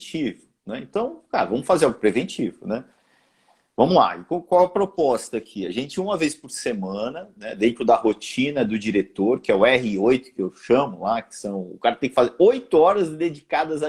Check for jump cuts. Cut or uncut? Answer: uncut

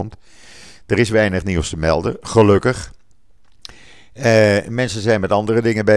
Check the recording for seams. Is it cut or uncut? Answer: uncut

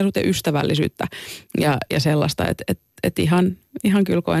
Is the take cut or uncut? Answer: uncut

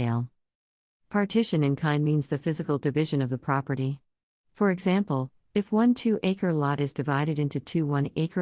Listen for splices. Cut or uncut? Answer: uncut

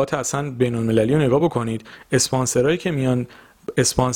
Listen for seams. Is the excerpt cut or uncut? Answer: uncut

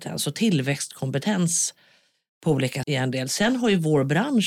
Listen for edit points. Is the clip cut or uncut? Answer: cut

